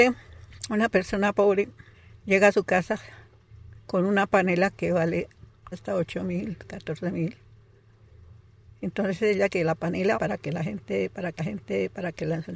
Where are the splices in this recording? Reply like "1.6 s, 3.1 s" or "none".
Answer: 1.9 s, 3.8 s, 5.7 s, 9.5 s, 10.1 s, 11.4 s